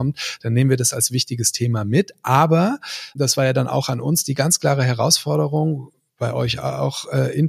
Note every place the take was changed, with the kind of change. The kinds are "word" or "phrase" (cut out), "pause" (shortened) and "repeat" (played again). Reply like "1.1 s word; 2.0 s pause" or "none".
none